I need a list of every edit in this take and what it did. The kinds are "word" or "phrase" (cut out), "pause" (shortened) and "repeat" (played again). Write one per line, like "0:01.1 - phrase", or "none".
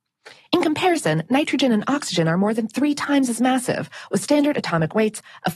none